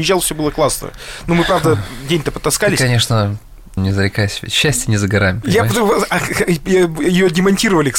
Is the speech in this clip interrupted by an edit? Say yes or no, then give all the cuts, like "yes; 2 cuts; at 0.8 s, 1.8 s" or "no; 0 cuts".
yes; 1 cut; at 3.8 s